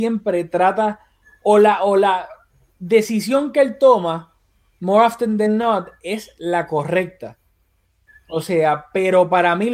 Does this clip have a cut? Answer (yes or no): no